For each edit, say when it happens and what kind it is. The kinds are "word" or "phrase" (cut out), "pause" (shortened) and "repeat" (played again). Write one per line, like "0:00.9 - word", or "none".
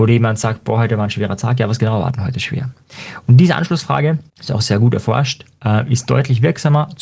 0:04.3 - pause